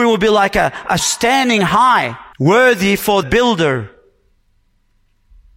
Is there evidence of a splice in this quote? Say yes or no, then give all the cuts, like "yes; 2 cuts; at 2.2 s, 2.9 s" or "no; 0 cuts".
yes; 3 cuts; at 1.0 s, 2.3 s, 3.2 s